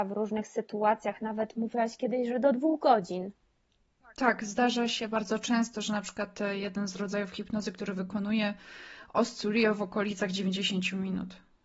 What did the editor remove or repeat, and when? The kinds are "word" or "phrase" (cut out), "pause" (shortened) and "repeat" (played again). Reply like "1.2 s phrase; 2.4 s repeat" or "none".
none